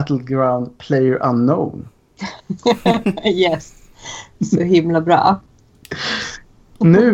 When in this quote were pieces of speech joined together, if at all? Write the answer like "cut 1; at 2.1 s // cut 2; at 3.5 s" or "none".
cut 1; at 2.4 s